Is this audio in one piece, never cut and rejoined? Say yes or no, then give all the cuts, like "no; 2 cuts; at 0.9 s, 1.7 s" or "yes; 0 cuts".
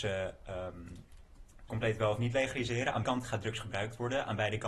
no; 2 cuts; at 1.7 s, 3.0 s